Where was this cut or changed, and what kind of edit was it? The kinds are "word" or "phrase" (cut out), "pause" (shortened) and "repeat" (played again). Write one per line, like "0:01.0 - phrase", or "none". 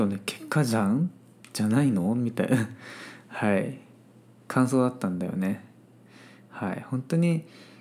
none